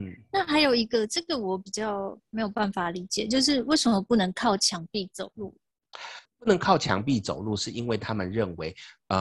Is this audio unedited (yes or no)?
no